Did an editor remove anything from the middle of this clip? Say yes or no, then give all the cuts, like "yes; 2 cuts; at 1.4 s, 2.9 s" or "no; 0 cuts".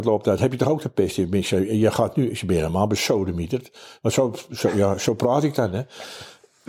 no; 0 cuts